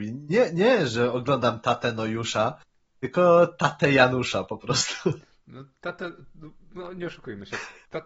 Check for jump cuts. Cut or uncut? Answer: uncut